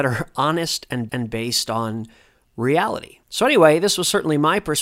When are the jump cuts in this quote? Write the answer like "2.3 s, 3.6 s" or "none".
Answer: 1.1 s, 3.2 s